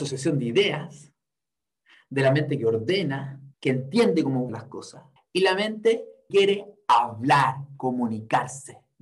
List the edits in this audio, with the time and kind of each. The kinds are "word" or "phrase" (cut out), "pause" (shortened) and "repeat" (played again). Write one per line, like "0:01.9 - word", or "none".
0:03.5 - pause
0:04.5 - word
0:05.2 - pause
0:06.3 - word